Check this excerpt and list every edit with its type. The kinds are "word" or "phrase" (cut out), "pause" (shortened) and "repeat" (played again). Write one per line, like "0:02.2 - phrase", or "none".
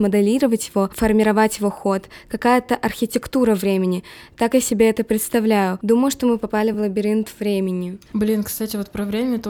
none